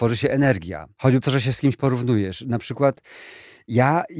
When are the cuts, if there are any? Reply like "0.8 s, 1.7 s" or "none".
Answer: 1.2 s